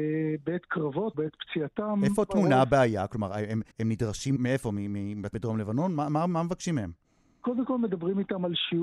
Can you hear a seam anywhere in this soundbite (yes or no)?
yes